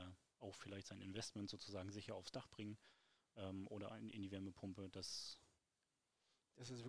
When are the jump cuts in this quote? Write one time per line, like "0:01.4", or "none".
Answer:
none